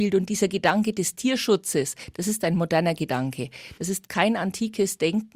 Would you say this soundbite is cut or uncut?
uncut